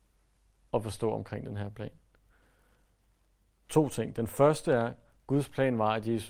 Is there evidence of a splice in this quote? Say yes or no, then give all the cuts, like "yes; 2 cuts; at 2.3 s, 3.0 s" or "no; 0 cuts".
no; 0 cuts